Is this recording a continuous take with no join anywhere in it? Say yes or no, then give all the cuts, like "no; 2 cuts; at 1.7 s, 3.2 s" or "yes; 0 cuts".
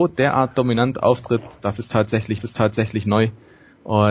no; 1 cut; at 2.4 s